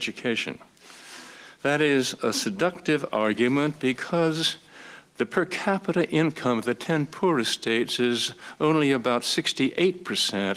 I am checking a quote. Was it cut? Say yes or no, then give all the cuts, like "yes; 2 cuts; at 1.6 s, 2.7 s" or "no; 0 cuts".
no; 0 cuts